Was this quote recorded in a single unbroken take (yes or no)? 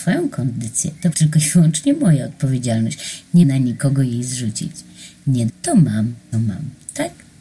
no